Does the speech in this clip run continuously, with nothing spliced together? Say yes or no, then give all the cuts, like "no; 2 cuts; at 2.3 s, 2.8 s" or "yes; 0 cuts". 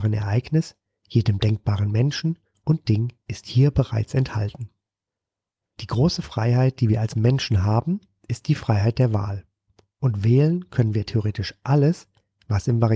yes; 0 cuts